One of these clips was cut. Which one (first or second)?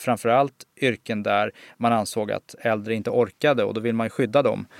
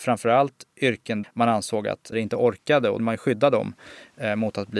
second